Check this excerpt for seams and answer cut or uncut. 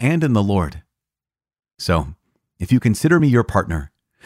uncut